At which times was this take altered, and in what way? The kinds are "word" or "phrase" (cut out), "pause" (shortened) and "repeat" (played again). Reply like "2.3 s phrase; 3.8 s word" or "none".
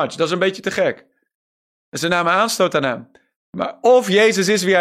none

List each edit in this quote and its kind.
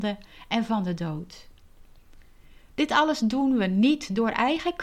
none

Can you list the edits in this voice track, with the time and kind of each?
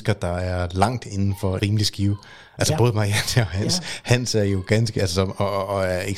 1.6 s word; 5.0 s word

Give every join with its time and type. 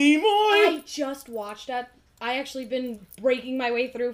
none

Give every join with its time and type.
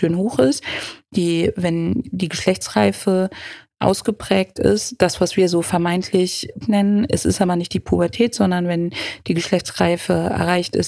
6.6 s word

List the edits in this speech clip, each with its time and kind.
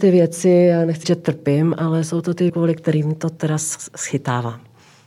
1.0 s word; 2.5 s word

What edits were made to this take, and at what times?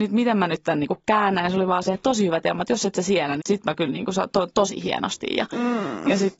3.4 s word

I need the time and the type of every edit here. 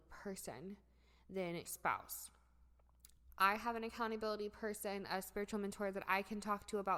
1.7 s word

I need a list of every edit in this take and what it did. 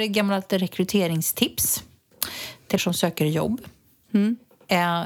2.8 s word

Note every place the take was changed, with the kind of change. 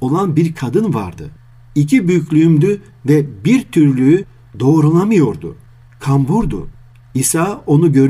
none

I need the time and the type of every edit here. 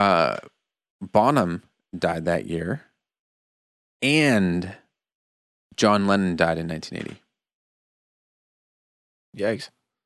none

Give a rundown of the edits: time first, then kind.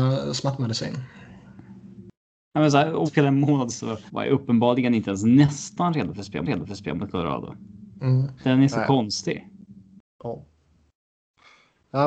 3.1 s phrase; 3.7 s word; 4.1 s pause; 6.5 s repeat; 8.4 s pause

